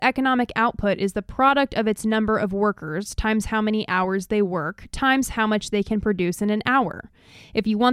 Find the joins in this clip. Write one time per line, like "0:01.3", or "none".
none